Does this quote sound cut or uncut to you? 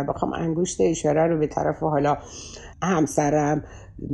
cut